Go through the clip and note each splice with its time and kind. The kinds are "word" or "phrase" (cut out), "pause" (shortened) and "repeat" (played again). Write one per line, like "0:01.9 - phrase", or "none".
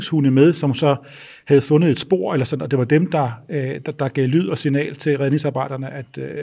none